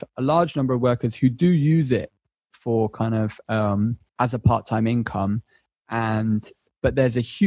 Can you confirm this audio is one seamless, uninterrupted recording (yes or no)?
no